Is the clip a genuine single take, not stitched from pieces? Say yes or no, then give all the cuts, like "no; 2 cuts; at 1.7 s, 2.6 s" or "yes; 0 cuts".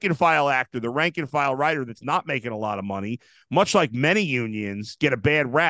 yes; 0 cuts